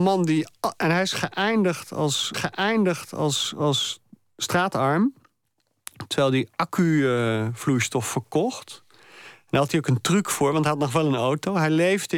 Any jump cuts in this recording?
yes; 1 cut; at 2.3 s

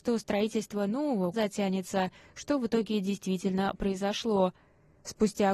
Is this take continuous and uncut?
no; 1 cut; at 1.3 s

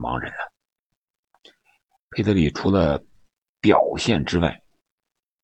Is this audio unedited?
yes; 0 cuts

